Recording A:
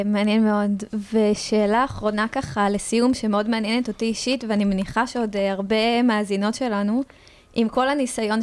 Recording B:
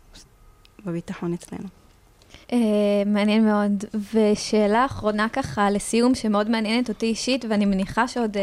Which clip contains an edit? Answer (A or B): B